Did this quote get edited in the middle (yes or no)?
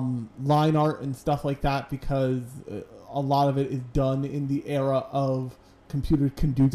no